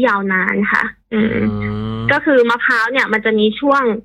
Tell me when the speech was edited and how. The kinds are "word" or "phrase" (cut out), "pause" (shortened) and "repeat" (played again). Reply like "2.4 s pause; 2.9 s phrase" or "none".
1.0 s pause